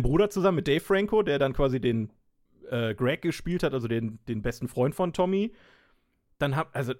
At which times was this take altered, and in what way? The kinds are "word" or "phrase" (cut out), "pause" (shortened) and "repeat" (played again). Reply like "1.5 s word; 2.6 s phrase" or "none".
none